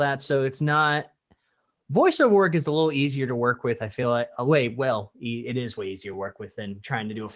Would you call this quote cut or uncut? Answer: uncut